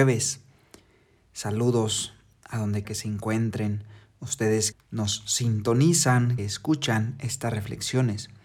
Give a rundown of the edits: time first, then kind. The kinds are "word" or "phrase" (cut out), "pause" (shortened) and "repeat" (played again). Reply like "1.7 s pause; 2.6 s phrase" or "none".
2.8 s word; 4.7 s word; 6.4 s word